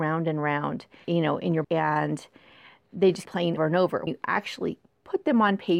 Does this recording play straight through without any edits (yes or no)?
no